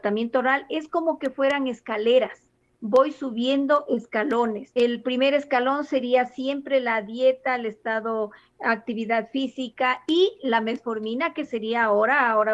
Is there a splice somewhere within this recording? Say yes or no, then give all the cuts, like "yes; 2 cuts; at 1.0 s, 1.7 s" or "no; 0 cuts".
no; 0 cuts